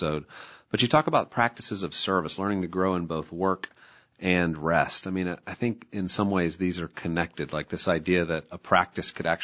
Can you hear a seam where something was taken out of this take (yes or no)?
no